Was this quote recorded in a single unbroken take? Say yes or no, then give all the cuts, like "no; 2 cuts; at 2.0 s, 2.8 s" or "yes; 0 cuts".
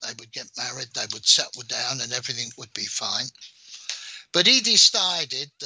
yes; 0 cuts